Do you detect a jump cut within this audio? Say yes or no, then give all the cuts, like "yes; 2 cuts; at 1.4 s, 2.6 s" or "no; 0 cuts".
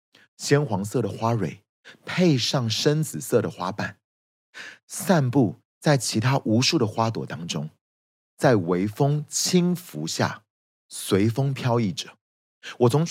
no; 0 cuts